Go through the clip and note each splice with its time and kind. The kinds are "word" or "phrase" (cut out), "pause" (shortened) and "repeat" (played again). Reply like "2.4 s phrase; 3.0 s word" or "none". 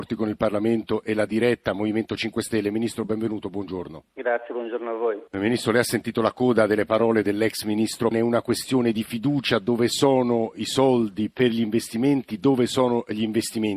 1.3 s word; 4.1 s pause; 5.3 s pause; 8.1 s word